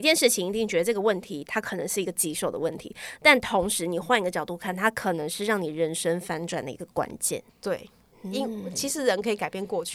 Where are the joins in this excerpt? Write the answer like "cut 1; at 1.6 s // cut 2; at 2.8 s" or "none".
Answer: cut 1; at 7.5 s